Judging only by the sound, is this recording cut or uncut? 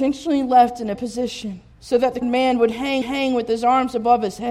cut